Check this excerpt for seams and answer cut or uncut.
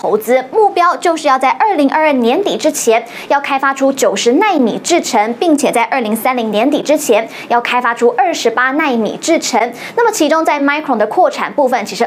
uncut